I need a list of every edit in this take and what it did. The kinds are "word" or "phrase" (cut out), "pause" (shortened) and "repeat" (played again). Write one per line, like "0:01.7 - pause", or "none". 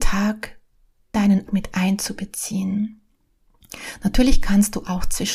0:01.1 - word
0:01.5 - word